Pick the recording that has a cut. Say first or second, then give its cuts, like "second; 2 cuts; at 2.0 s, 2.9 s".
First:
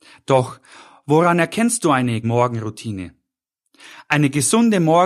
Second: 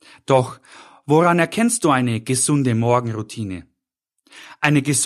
first; 1 cut; at 2.2 s